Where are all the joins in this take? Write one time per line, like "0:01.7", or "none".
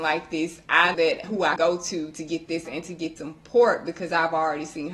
0:00.9
0:01.6
0:02.6
0:03.2